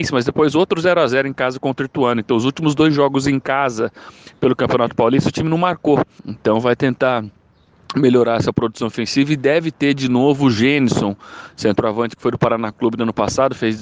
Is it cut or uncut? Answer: uncut